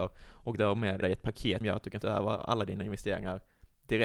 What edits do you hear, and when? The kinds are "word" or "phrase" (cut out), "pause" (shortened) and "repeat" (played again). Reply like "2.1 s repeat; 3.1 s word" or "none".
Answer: 1.0 s word; 1.6 s word; 2.0 s word